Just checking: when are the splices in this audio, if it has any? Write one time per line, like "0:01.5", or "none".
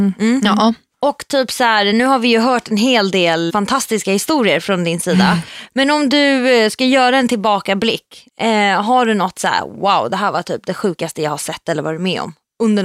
0:03.5